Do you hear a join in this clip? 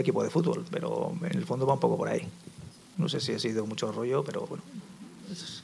yes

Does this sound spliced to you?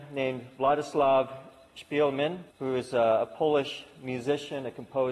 yes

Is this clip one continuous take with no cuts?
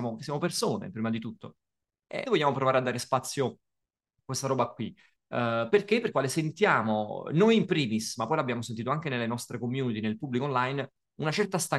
no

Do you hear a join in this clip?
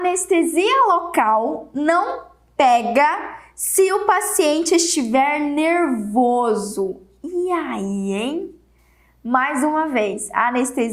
no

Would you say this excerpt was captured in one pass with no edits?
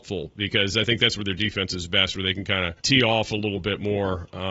no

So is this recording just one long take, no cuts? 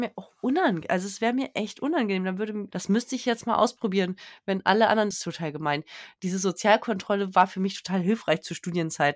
no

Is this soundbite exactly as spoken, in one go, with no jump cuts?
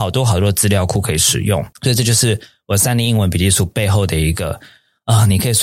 no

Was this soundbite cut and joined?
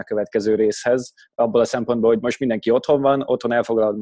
no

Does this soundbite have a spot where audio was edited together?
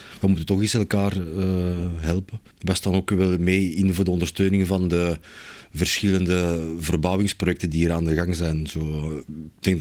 yes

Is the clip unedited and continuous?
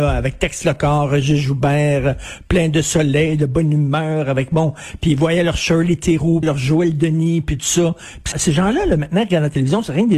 no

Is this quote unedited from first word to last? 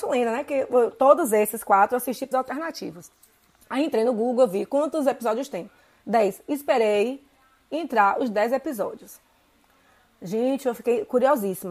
no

